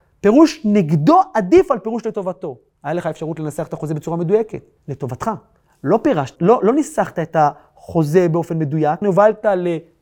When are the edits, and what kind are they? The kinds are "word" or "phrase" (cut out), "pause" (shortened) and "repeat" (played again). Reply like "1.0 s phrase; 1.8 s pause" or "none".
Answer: 2.7 s pause; 4.8 s pause; 6.4 s word; 9.0 s word